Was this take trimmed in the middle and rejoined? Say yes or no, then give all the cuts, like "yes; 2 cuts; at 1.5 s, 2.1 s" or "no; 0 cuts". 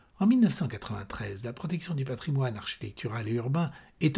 no; 0 cuts